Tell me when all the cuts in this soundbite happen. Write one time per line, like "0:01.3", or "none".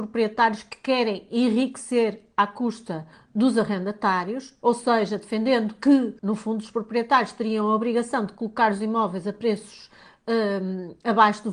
0:03.1
0:06.2